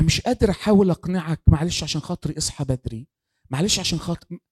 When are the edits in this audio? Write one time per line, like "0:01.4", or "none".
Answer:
none